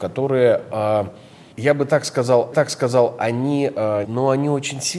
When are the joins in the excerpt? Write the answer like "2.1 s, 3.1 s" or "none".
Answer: 1.5 s, 2.5 s, 4.0 s